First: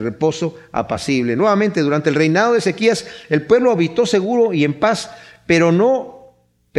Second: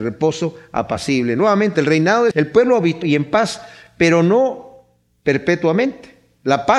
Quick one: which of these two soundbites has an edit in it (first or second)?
second